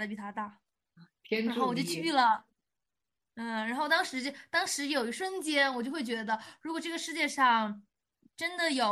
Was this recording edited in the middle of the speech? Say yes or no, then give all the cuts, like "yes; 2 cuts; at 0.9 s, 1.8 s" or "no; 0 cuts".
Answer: no; 0 cuts